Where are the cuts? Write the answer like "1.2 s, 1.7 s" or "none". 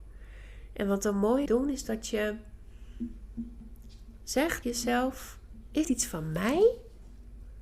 1.5 s, 4.6 s, 5.8 s